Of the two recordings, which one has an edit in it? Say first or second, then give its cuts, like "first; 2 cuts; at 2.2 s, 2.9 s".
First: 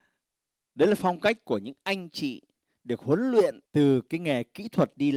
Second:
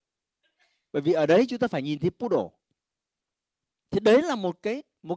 first; 1 cut; at 3.7 s